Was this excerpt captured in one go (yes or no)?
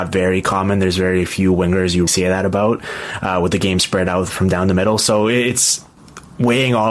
no